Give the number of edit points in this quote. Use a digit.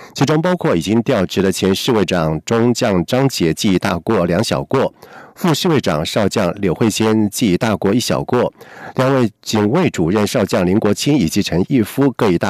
1